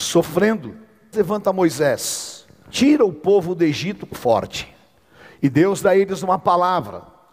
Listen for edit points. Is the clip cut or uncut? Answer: cut